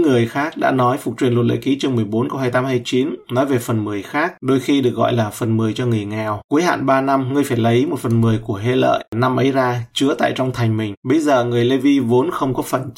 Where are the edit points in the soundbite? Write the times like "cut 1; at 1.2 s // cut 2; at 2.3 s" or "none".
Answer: none